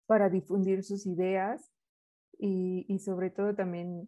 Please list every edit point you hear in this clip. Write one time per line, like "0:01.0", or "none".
none